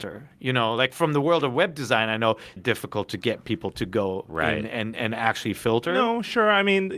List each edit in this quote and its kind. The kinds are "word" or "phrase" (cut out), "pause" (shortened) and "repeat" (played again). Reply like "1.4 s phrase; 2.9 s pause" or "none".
2.6 s word